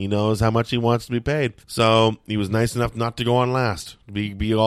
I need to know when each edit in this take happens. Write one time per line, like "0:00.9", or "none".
0:01.6

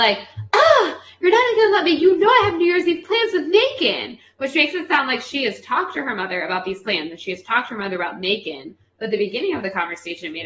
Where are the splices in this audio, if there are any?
none

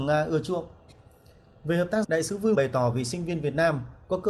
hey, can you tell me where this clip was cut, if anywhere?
0:02.0
0:02.5

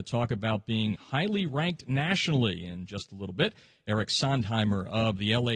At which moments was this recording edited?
none

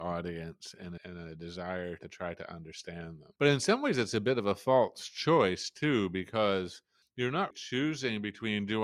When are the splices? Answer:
0:01.0
0:03.4
0:07.0
0:07.5

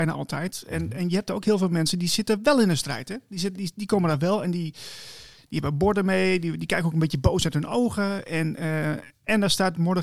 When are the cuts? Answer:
none

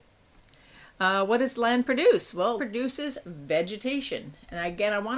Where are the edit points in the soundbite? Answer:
0:02.6

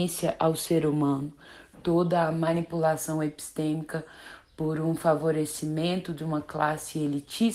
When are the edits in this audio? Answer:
none

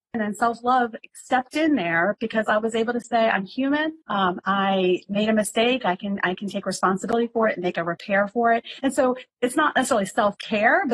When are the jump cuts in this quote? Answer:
0:04.0

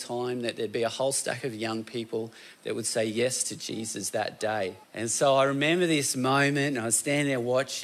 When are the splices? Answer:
0:04.8

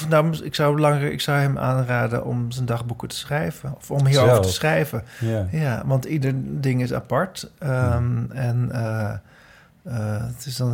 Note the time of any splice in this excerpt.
none

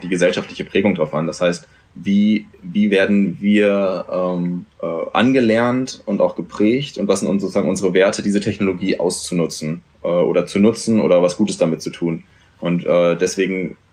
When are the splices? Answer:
0:04.7

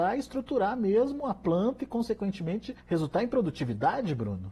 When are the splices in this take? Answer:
0:02.8

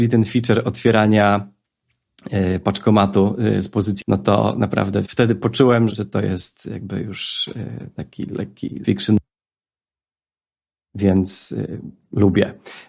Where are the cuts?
0:04.0
0:05.0
0:05.9
0:08.8

